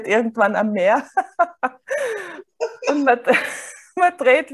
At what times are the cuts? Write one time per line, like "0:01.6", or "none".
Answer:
none